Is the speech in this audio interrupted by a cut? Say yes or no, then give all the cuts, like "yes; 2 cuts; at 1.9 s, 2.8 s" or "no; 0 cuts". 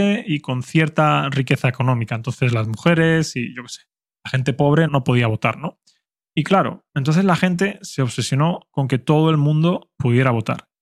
yes; 2 cuts; at 4.9 s, 6.9 s